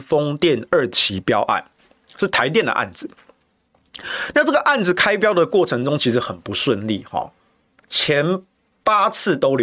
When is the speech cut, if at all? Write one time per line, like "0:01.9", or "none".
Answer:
none